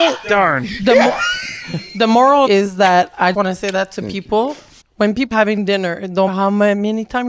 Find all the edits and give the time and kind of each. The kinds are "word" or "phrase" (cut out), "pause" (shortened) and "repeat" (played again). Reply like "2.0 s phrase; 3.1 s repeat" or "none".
2.5 s phrase; 3.3 s word; 4.8 s pause; 5.3 s word; 6.3 s word